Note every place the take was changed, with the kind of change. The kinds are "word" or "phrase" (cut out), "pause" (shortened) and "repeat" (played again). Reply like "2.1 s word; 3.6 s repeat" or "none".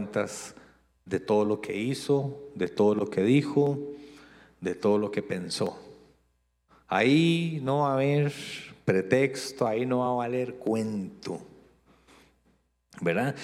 none